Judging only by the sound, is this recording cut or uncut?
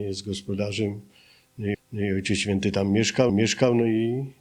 cut